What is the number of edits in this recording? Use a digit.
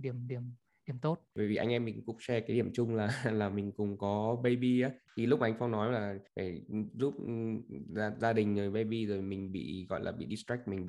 2